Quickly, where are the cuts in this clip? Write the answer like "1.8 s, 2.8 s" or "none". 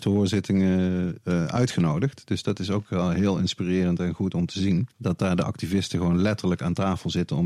4.9 s